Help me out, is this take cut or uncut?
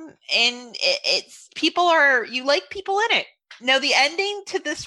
uncut